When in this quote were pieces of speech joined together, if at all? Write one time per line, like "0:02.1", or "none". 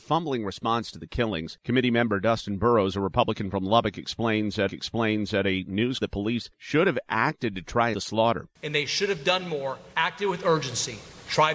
0:04.7
0:06.0
0:07.9
0:09.9